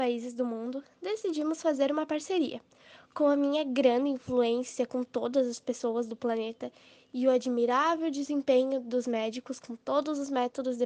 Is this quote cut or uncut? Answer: uncut